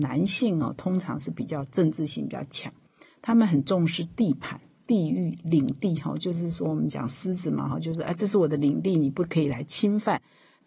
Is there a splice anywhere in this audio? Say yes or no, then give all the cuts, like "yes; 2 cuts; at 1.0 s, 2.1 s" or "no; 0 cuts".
no; 0 cuts